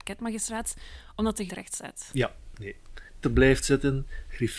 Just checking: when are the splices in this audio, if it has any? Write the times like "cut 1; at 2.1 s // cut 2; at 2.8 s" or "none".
cut 1; at 1.5 s // cut 2; at 3.2 s